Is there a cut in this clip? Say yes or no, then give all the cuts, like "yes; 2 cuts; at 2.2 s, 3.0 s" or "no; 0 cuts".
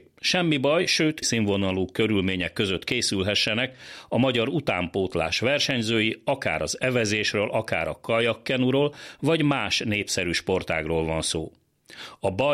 yes; 1 cut; at 1.2 s